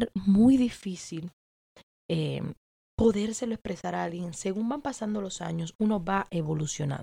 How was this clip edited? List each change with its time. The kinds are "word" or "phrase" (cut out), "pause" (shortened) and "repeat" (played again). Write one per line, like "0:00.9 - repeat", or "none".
none